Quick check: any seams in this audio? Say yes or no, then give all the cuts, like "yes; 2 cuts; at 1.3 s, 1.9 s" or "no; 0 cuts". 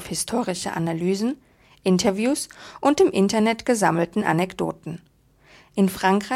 no; 0 cuts